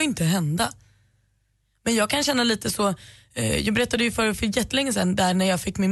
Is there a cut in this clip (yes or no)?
no